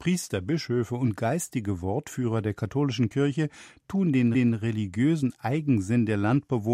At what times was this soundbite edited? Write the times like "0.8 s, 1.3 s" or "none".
4.3 s